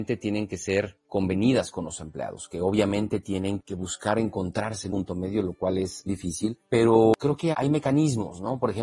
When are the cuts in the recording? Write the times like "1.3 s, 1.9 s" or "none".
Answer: 4.9 s, 6.1 s, 7.5 s